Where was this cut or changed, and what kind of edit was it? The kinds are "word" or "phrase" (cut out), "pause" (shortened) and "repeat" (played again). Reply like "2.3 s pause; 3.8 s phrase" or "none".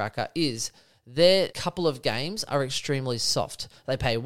1.5 s word